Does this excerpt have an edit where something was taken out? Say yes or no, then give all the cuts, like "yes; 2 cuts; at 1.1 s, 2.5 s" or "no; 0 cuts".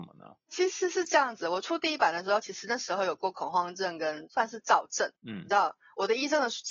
yes; 1 cut; at 5.2 s